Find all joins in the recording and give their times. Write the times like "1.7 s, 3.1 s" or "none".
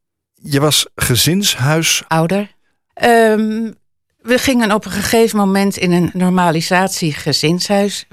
none